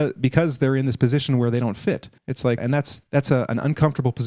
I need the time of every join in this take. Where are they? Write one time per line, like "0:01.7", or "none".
0:02.2
0:02.6
0:03.1

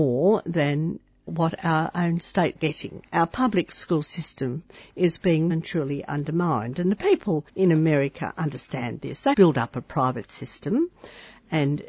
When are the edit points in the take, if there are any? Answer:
0:01.3
0:02.6
0:03.1
0:05.5
0:07.5
0:09.3

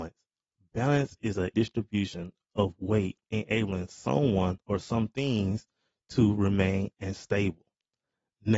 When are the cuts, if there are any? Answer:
0:01.5
0:03.2
0:04.6
0:06.9

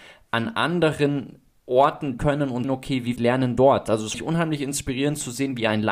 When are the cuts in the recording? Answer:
0:02.2
0:02.6
0:03.2
0:04.1

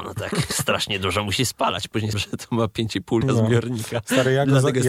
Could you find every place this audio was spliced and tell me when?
0:02.1
0:03.2

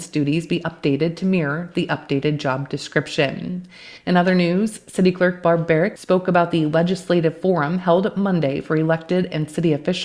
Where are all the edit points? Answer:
0:04.0

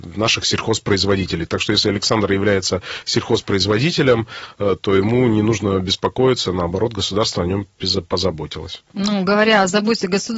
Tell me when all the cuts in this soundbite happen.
0:08.8

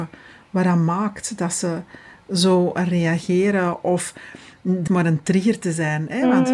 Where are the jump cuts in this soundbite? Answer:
0:04.9

